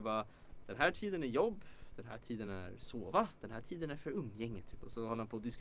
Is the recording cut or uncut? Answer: uncut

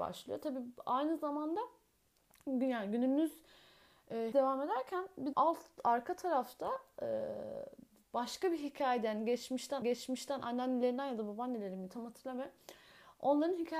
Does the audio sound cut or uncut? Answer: cut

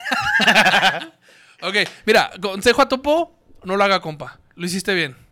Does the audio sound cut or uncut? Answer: uncut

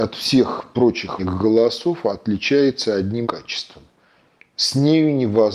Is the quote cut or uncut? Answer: cut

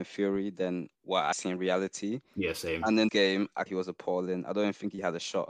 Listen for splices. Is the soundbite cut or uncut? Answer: cut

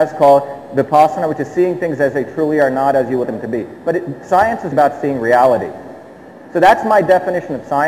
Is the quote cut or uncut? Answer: cut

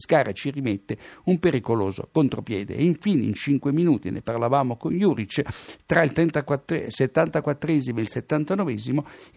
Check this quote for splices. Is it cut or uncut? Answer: uncut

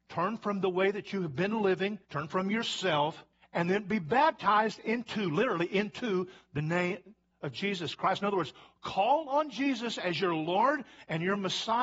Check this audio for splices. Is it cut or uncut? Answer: cut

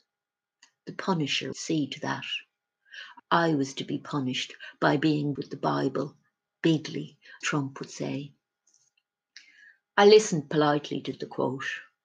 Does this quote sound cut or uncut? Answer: cut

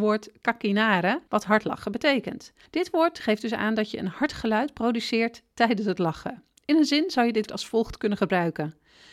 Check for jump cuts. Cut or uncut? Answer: cut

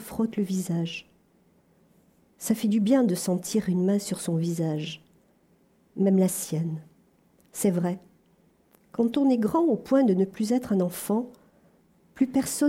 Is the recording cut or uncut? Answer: uncut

